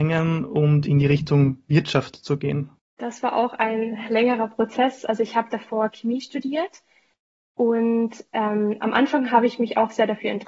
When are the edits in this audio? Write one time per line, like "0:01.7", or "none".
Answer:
none